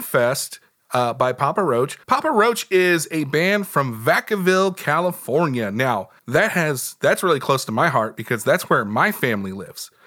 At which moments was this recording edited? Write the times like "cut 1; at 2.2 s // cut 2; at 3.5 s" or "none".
cut 1; at 2.0 s // cut 2; at 6.2 s